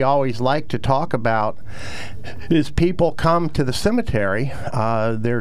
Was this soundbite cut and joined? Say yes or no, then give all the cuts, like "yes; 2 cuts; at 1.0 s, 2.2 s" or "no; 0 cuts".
no; 0 cuts